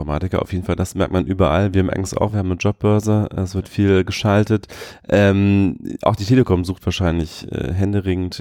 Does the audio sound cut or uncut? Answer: uncut